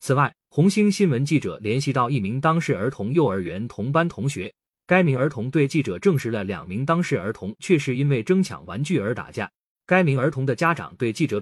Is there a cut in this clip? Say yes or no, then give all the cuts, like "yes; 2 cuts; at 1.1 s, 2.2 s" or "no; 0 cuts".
no; 0 cuts